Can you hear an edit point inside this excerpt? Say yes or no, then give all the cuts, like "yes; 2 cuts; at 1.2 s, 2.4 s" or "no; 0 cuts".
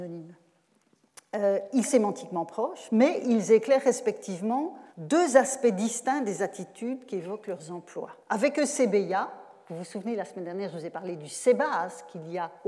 yes; 3 cuts; at 1.8 s, 4.9 s, 8.2 s